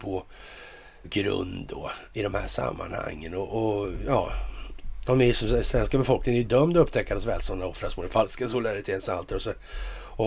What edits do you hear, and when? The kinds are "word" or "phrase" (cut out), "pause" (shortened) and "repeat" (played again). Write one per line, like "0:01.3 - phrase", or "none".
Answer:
0:01.0 - word